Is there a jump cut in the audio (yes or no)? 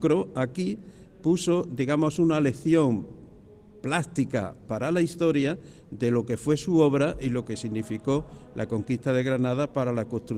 no